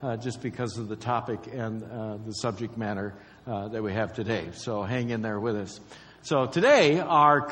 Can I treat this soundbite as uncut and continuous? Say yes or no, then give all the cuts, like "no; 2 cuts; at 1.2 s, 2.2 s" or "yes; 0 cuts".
yes; 0 cuts